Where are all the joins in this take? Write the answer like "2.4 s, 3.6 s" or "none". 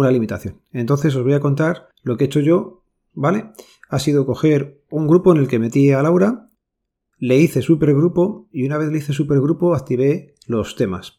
1.9 s